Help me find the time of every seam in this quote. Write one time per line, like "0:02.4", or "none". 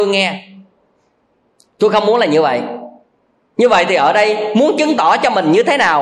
none